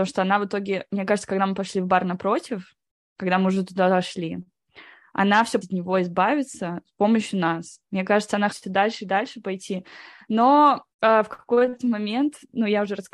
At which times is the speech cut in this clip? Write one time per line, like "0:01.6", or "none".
0:05.6
0:08.5
0:10.9